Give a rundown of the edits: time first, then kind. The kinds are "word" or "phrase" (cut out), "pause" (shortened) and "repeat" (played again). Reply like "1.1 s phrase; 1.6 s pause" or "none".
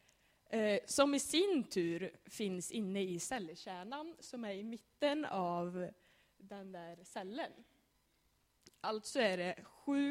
none